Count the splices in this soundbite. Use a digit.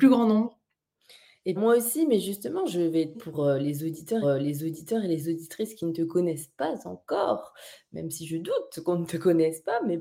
3